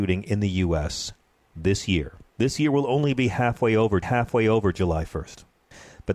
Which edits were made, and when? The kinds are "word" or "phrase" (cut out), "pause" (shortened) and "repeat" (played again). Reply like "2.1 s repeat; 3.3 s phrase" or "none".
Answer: 2.3 s pause; 4.0 s repeat